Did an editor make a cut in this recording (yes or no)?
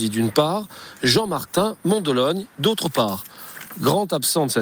no